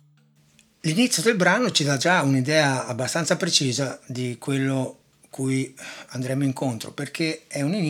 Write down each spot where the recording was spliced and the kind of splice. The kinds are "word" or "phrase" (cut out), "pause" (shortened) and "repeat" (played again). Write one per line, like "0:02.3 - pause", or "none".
none